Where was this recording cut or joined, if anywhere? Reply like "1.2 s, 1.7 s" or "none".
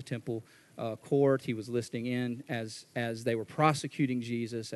none